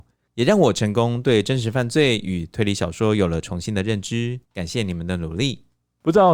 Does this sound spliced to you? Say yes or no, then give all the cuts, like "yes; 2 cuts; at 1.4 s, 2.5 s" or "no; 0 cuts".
yes; 1 cut; at 4.4 s